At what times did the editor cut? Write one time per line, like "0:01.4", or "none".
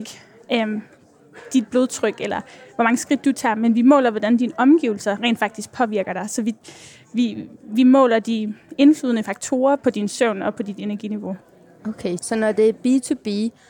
0:12.2